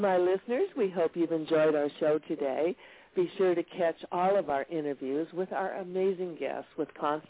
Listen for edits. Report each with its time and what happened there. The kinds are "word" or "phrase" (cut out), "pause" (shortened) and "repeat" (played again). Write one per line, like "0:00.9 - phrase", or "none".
none